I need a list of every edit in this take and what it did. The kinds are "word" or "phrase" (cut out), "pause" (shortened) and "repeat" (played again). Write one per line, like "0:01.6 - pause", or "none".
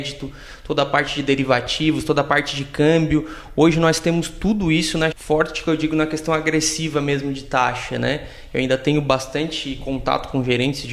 0:05.1 - phrase